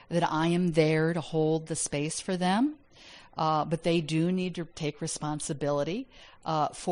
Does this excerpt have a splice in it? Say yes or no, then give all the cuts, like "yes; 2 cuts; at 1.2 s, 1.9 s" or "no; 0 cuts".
no; 0 cuts